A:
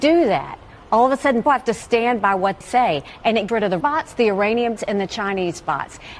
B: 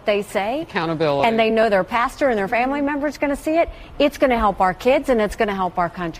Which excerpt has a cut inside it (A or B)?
A